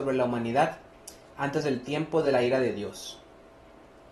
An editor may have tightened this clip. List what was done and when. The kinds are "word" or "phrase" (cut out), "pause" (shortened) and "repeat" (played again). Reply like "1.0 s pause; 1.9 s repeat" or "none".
none